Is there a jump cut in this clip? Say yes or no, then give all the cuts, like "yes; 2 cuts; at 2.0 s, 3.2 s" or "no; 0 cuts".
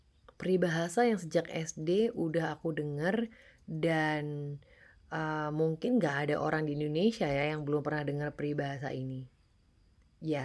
no; 0 cuts